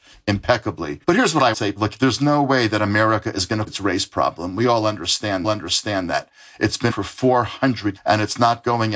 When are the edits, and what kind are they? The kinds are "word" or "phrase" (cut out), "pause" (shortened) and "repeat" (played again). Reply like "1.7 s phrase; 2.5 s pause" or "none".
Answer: 1.0 s pause; 1.5 s word; 3.7 s phrase; 5.4 s repeat; 6.9 s word; 8.0 s word